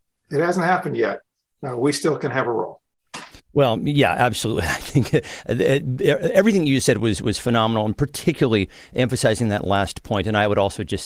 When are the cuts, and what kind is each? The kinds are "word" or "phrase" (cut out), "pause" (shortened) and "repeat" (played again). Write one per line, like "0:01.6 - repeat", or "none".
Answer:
none